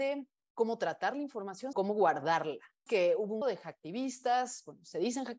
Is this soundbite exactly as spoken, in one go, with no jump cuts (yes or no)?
no